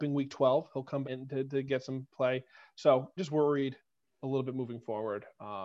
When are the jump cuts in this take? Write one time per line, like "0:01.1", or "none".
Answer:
0:01.0
0:03.2